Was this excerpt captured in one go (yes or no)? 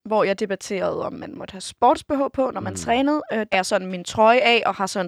no